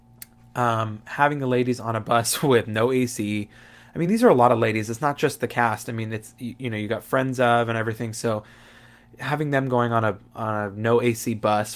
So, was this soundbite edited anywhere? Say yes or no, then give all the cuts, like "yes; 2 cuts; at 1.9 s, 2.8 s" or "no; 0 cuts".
no; 0 cuts